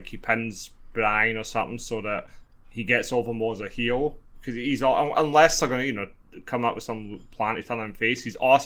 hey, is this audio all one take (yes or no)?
yes